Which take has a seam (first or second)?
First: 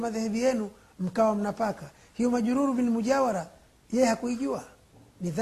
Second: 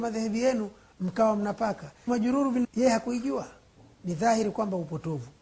second